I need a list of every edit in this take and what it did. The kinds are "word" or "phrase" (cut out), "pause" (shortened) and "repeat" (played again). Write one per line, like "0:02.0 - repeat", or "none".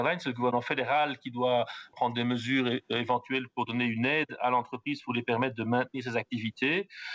0:01.9 - word